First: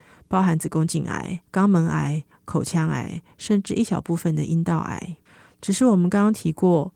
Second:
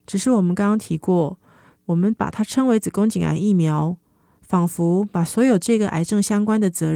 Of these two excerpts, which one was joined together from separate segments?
first; 2 cuts; at 1.5 s, 5.3 s

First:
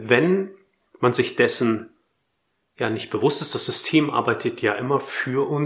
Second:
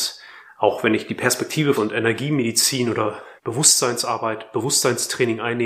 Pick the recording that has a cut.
second; 2 cuts; at 1.7 s, 3.4 s

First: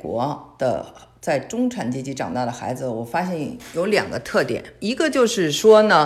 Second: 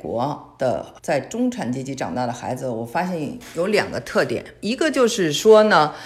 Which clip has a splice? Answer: second; 1 cut; at 1.0 s

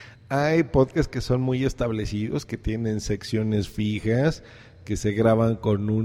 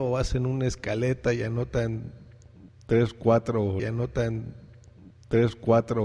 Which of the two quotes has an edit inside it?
second; 1 cut; at 3.8 s

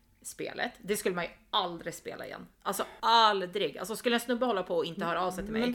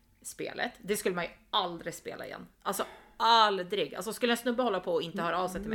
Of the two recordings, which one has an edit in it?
first; 1 cut; at 3.0 s

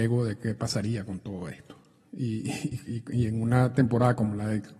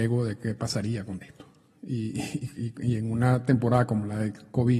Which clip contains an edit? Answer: second; 1 cut; at 1.2 s

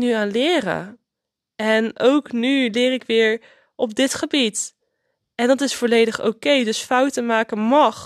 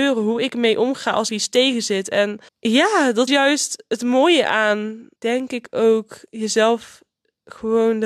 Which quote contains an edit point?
second; 4 cuts; at 1.3 s, 2.5 s, 3.3 s, 5.2 s

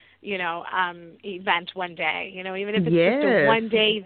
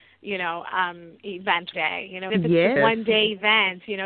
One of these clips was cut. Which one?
second; 3 cuts; at 1.7 s, 2.3 s, 2.8 s

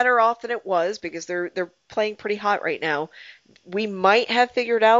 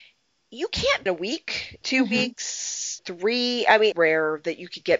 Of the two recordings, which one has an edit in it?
second; 4 cuts; at 1.1 s, 1.8 s, 3.0 s, 3.9 s

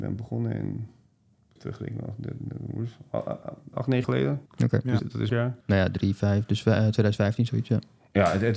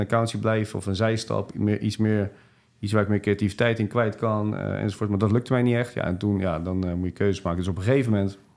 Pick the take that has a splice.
first; 7 cuts; at 1.6 s, 3.7 s, 4.0 s, 4.5 s, 5.0 s, 5.3 s, 5.6 s

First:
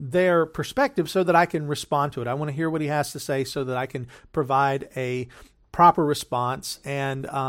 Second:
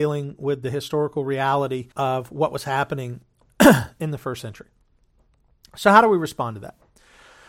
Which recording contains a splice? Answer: second; 1 cut; at 1.9 s

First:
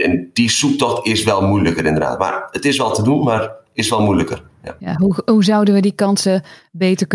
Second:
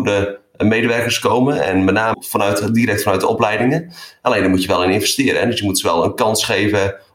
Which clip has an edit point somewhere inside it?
second; 1 cut; at 2.1 s

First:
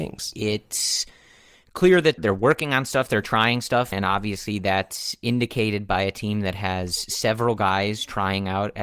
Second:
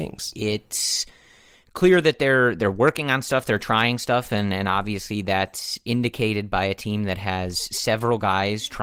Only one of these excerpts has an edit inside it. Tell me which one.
first; 2 cuts; at 2.2 s, 3.9 s

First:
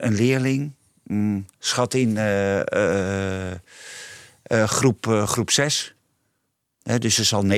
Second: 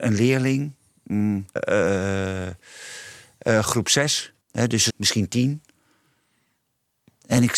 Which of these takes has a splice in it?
second; 4 cuts; at 1.6 s, 3.6 s, 4.4 s, 4.9 s

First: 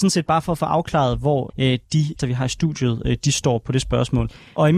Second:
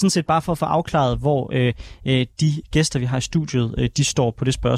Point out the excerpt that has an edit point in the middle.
first; 2 cuts; at 1.5 s, 2.2 s

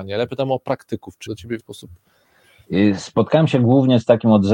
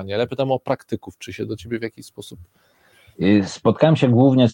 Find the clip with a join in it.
first; 2 cuts; at 1.3 s, 1.6 s

